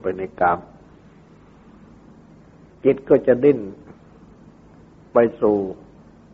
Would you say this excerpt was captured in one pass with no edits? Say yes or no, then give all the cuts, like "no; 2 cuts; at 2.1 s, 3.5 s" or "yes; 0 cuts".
yes; 0 cuts